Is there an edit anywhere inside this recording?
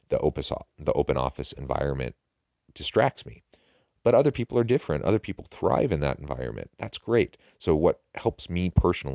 no; 0 cuts

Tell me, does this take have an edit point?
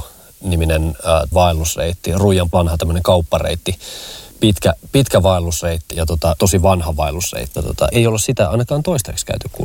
yes; 7 cuts; at 1.3 s, 2.5 s, 4.3 s, 5.9 s, 6.4 s, 7.6 s, 7.9 s

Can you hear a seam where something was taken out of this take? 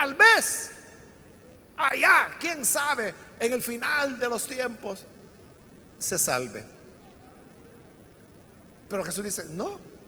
no; 0 cuts

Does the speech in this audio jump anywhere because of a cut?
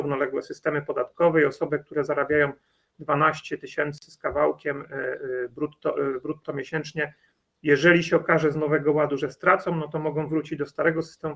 no; 0 cuts

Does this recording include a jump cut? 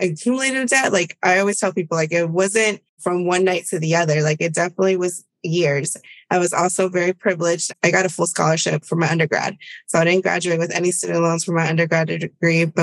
yes; 1 cut; at 2.9 s

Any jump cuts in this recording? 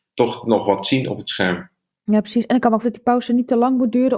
yes; 1 cut; at 2.8 s

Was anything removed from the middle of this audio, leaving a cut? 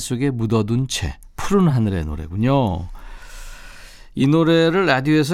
no; 0 cuts

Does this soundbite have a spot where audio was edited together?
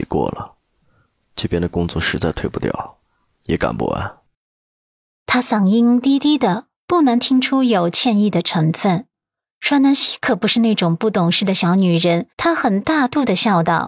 yes; 1 cut; at 12.3 s

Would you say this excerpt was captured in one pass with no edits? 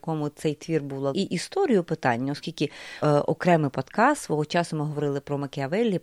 no; 2 cuts; at 1.1 s, 3.0 s

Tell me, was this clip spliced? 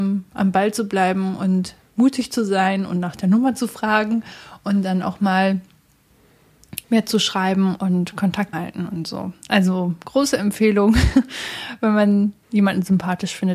yes; 3 cuts; at 6.8 s, 8.5 s, 12.4 s

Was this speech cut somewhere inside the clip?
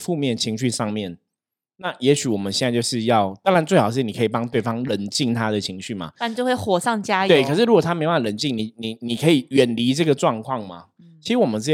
no; 0 cuts

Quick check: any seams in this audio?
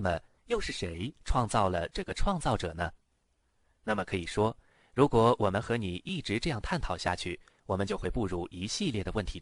no; 0 cuts

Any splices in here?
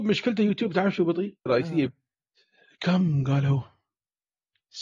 yes; 2 cuts; at 1.5 s, 1.9 s

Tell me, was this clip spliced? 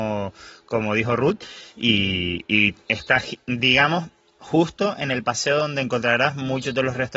no; 0 cuts

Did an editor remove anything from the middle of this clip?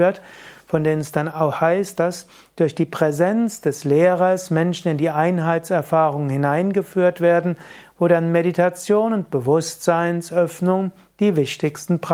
no; 0 cuts

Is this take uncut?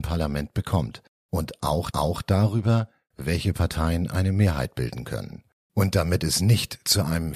no; 1 cut; at 1.9 s

